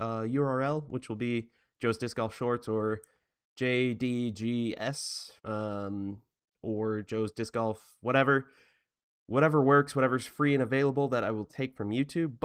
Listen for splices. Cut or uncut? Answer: cut